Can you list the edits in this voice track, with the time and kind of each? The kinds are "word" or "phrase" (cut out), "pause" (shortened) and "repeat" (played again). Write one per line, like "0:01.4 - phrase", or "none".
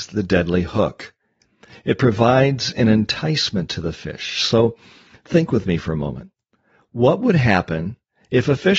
none